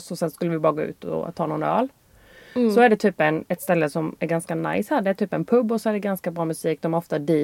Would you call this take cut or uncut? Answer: uncut